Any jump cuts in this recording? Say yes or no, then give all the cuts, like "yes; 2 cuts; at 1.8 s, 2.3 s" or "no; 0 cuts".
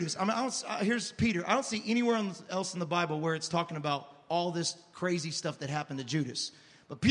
no; 0 cuts